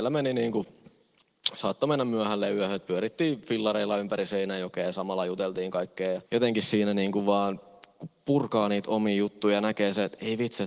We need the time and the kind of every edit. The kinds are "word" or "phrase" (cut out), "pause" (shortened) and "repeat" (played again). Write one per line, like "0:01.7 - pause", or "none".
0:06.2 - pause